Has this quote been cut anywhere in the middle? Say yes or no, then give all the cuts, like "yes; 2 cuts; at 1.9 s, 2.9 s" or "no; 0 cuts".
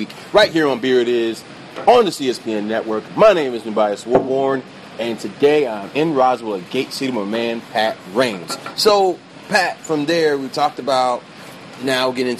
no; 0 cuts